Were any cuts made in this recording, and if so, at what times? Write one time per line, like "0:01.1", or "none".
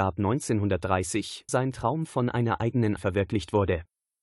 0:01.5
0:03.0